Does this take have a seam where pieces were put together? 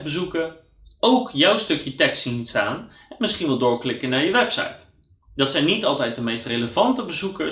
no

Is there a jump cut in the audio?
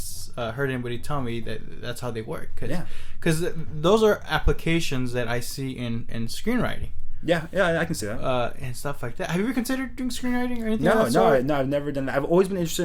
no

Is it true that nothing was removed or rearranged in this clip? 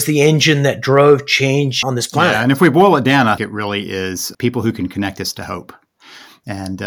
no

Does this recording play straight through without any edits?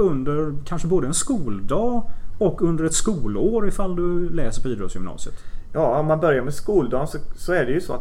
yes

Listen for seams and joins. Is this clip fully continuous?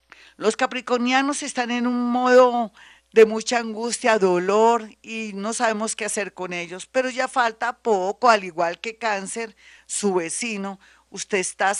yes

